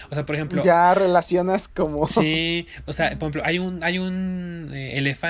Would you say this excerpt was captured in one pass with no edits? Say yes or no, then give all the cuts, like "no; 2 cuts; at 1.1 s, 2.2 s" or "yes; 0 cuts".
yes; 0 cuts